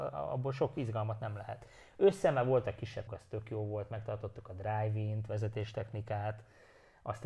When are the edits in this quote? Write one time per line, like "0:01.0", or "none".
0:03.1